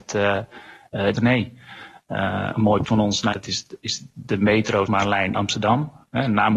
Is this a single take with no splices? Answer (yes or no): no